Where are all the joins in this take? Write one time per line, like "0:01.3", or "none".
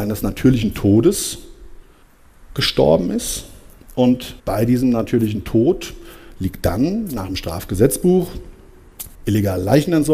0:02.0
0:04.4
0:09.1